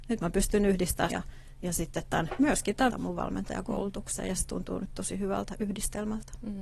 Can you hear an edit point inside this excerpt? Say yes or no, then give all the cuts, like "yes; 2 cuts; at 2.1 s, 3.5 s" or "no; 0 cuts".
yes; 2 cuts; at 1.1 s, 2.9 s